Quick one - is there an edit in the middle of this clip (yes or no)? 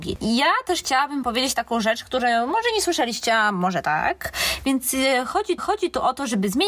yes